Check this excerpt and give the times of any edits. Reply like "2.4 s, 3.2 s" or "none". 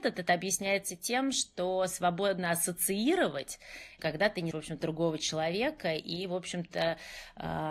4.0 s, 4.5 s, 4.8 s

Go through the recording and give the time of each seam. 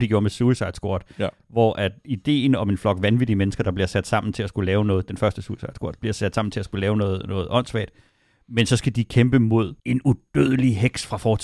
9.8 s

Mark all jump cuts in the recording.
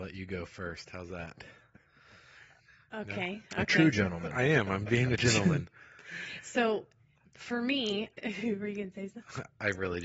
5.2 s, 7.3 s, 8.1 s

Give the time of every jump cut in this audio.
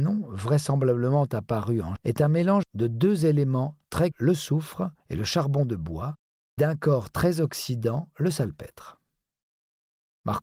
2.0 s, 2.6 s, 4.1 s, 5.0 s, 6.6 s

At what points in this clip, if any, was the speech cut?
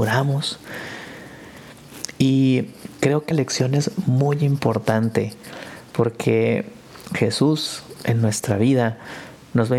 3.3 s

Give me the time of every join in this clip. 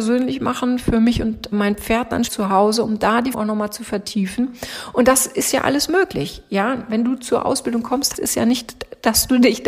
1.5 s, 2.3 s, 3.3 s, 8.1 s

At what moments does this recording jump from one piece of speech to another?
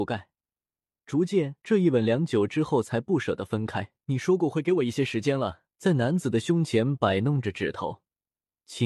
1.6 s, 4.0 s, 5.7 s

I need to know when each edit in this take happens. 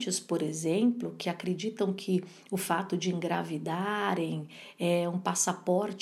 none

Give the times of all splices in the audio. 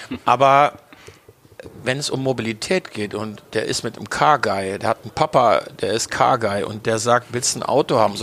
3.4 s

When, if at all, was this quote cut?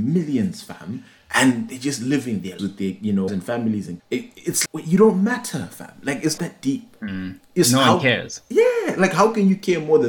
2.6 s, 3.3 s, 4.0 s, 4.7 s, 6.4 s

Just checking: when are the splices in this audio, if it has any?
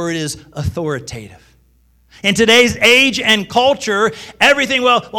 none

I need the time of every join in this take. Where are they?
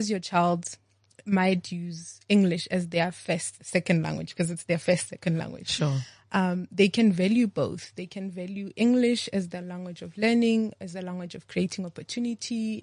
3.6 s

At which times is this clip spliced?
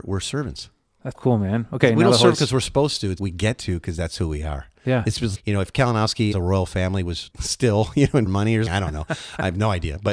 1.1 s, 3.2 s, 5.3 s, 6.3 s, 7.3 s, 8.3 s, 8.7 s

